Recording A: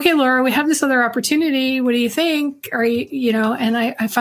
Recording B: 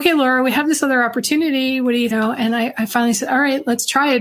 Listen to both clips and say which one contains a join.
B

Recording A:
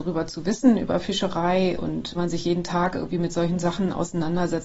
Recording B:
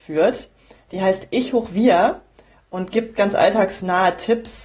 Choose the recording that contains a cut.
A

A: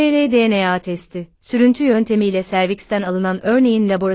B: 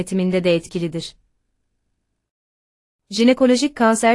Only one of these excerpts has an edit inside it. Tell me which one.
A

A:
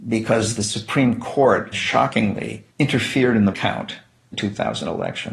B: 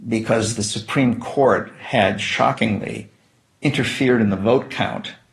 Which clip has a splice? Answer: A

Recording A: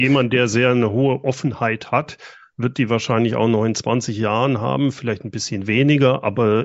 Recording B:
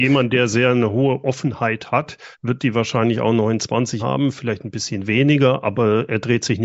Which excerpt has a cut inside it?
B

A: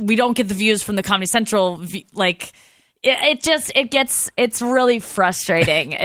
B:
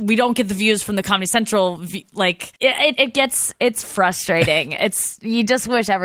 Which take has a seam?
B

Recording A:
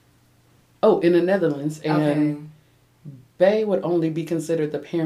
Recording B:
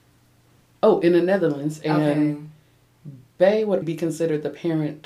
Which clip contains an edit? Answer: B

